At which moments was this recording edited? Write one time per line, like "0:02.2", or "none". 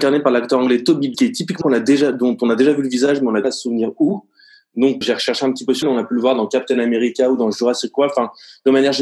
0:01.1
0:01.6
0:03.4
0:05.0
0:05.8